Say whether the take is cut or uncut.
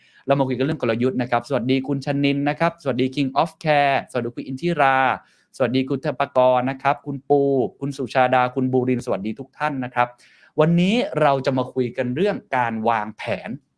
uncut